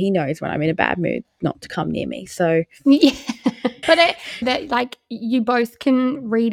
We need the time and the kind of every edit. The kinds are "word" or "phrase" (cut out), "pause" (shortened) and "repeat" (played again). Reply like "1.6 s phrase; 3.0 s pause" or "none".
3.8 s word; 4.4 s phrase